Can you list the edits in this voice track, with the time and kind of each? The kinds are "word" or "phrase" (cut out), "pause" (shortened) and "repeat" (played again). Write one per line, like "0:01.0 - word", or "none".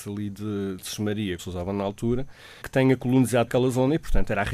0:01.4 - word
0:02.6 - word
0:03.5 - word

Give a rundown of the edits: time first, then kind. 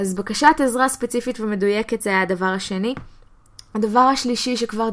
none

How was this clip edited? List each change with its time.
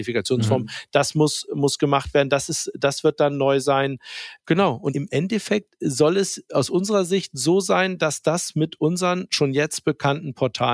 none

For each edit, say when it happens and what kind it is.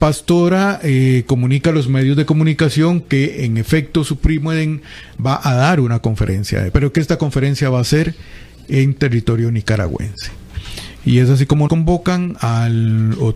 0:06.7 - word
0:11.7 - word

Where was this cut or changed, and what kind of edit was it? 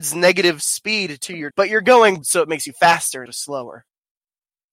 0:01.5 - word
0:02.2 - word
0:03.3 - word

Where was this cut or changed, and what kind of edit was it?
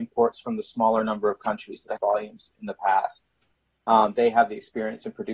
0:02.0 - phrase

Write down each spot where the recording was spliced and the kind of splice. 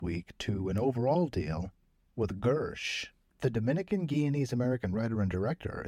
none

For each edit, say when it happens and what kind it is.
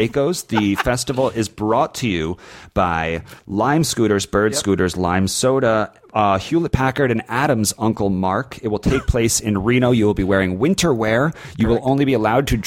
0:03.4 - pause

